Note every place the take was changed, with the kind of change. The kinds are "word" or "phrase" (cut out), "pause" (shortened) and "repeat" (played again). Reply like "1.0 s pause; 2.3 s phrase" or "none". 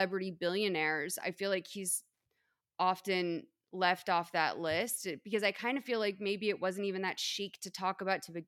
none